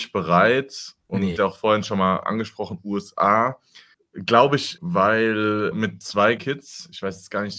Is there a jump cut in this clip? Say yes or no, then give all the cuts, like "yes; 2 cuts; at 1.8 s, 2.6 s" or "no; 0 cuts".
yes; 5 cuts; at 1.4 s, 3.9 s, 4.8 s, 5.7 s, 6.4 s